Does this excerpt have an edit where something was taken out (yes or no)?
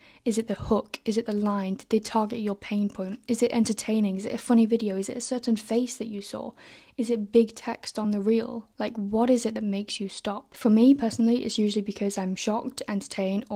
no